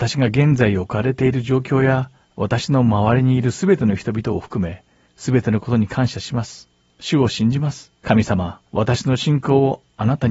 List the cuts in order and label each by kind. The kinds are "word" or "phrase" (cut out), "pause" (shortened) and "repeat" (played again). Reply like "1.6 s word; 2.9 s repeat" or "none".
2.2 s pause; 5.1 s pause; 6.8 s pause; 8.0 s pause; 8.7 s pause